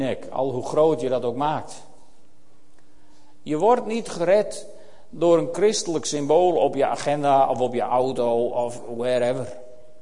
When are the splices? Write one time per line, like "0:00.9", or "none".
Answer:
none